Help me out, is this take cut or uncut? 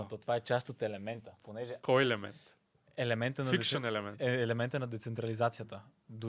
uncut